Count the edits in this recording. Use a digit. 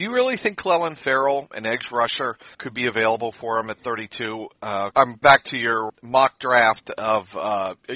5